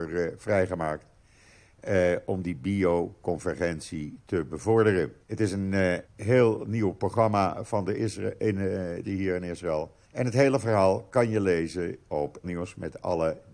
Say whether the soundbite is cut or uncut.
cut